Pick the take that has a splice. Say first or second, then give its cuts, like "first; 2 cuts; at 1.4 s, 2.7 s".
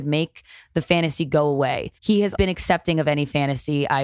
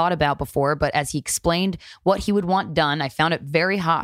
first; 2 cuts; at 2.0 s, 2.4 s